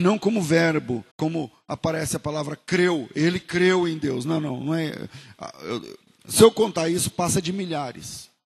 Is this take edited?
yes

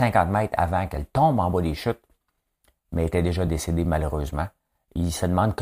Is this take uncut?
yes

